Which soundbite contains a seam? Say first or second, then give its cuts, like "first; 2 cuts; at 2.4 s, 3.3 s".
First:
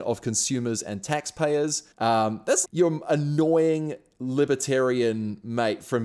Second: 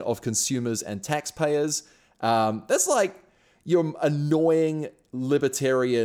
first; 2 cuts; at 1.9 s, 2.6 s